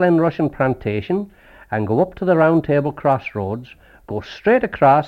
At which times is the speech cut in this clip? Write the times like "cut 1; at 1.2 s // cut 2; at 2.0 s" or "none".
none